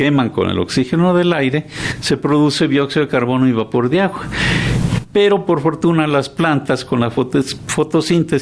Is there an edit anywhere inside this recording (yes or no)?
no